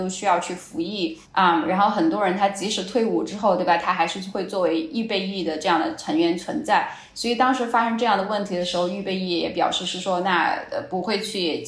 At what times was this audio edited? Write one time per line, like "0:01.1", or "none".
0:01.2